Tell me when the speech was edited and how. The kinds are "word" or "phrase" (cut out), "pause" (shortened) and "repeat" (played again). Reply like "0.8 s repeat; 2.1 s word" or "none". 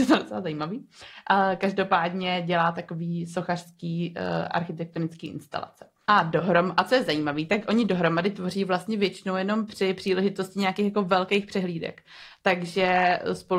none